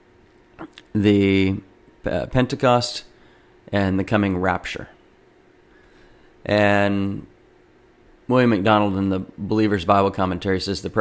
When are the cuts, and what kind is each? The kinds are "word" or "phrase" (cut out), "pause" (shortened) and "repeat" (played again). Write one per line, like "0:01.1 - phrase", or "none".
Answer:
none